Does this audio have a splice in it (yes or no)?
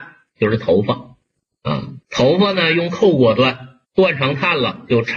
yes